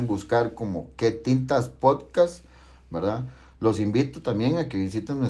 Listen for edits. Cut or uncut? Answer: uncut